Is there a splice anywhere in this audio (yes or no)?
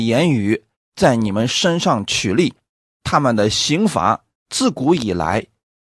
no